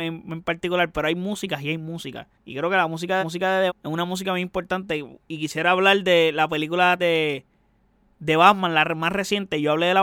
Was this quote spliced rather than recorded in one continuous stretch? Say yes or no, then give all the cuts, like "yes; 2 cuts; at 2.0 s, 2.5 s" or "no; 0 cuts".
yes; 4 cuts; at 2.3 s, 3.2 s, 3.7 s, 7.0 s